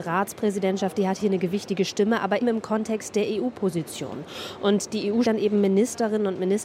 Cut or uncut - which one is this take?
cut